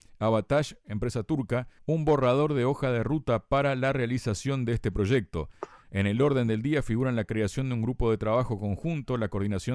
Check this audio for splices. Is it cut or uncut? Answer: cut